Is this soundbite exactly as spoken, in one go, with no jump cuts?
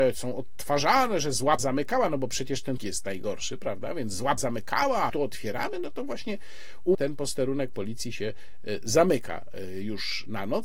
no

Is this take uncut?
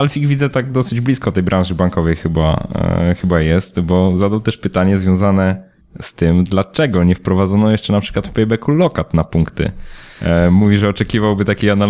no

